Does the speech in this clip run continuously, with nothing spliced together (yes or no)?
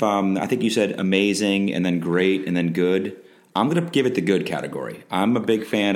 yes